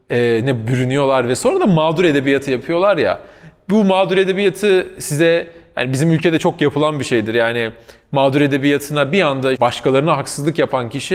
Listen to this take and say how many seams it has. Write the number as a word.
one